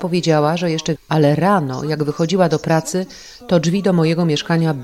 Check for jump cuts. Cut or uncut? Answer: cut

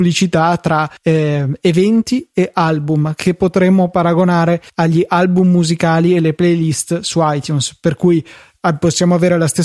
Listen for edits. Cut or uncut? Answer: cut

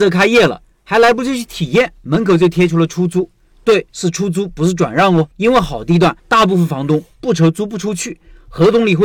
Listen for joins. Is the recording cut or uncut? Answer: cut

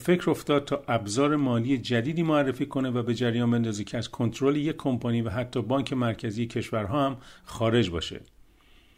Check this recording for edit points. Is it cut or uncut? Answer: uncut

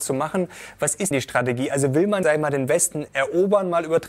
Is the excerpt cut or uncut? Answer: cut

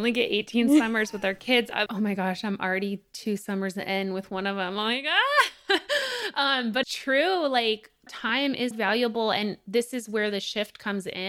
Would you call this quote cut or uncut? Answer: cut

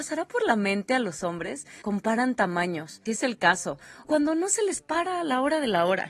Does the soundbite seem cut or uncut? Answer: cut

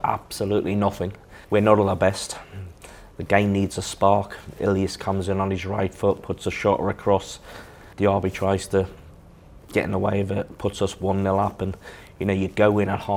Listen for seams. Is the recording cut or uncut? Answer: cut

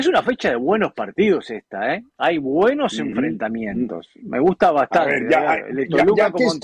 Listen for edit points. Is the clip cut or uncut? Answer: cut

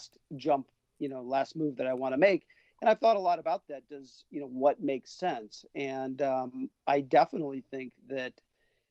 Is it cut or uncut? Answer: uncut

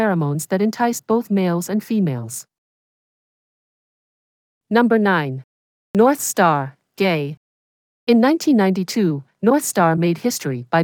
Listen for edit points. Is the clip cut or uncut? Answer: uncut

